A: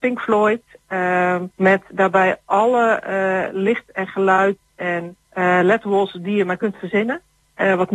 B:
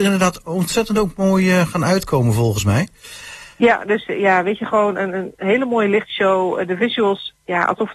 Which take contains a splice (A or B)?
A